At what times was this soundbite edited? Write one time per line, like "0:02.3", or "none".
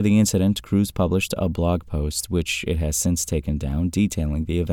none